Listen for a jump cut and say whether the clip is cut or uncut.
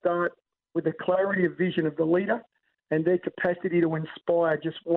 uncut